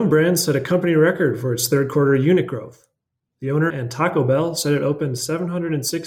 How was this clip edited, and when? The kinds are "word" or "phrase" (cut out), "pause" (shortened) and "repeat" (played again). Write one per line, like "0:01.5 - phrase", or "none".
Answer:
0:03.7 - phrase